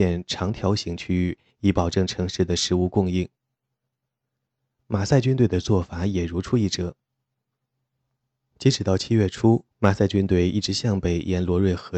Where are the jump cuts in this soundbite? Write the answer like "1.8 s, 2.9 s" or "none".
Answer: 9.7 s